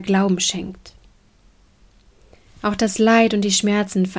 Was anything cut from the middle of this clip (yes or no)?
no